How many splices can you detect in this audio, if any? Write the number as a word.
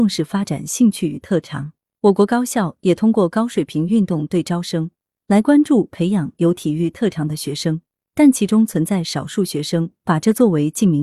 zero